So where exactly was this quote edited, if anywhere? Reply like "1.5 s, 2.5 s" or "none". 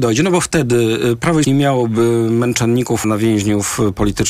1.4 s, 3.0 s